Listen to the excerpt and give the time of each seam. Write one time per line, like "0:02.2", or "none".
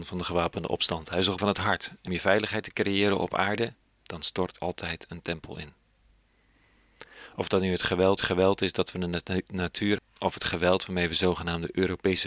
0:01.4
0:02.1
0:03.9
0:04.6
0:08.2
0:10.0